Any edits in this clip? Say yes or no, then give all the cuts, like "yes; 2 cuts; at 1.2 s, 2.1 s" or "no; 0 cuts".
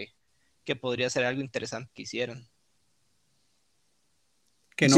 yes; 1 cut; at 1.9 s